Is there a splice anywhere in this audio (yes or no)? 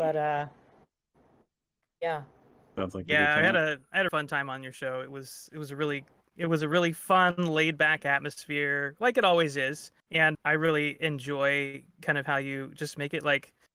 yes